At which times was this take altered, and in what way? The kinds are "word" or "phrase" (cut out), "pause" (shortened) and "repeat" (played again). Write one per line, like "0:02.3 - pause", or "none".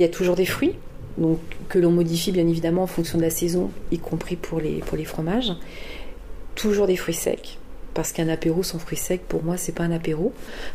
none